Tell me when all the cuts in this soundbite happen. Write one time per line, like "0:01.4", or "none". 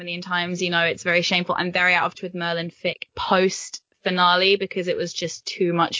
0:02.1
0:03.1